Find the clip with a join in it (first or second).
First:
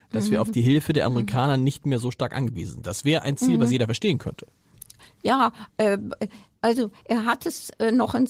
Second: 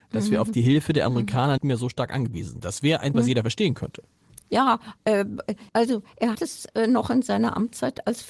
second